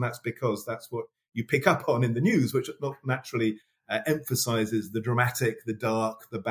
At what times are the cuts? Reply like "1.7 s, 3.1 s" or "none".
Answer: none

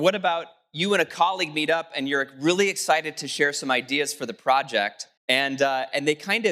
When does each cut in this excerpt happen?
5.2 s

